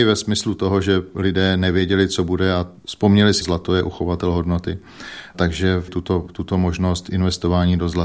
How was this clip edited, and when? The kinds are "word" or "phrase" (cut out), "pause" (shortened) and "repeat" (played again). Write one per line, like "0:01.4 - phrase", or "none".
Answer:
0:03.4 - phrase
0:05.9 - word